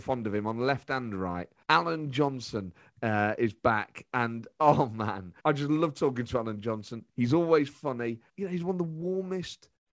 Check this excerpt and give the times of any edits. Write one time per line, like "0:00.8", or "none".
0:01.6
0:05.4
0:08.3